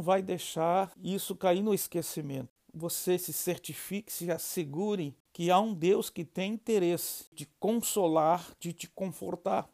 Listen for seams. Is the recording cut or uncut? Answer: cut